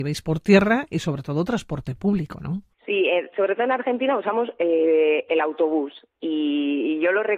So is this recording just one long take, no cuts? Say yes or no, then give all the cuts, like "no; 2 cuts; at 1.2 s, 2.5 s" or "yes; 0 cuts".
no; 1 cut; at 2.7 s